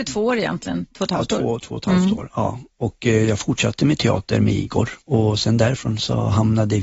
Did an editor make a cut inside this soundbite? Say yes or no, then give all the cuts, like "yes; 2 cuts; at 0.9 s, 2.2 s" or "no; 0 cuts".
yes; 1 cut; at 5.0 s